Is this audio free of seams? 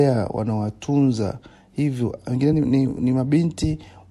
yes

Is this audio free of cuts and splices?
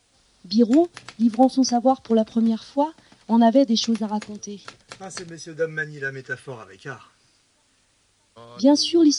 yes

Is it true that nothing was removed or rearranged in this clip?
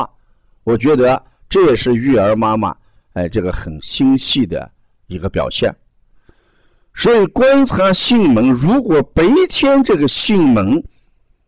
yes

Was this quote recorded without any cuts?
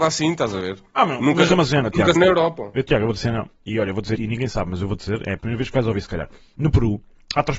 no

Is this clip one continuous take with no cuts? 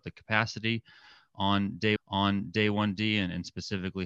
no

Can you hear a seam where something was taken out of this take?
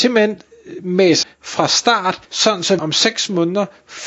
yes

